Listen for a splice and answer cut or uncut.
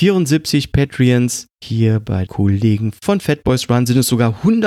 cut